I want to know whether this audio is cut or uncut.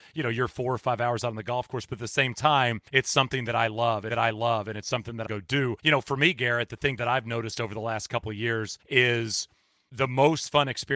cut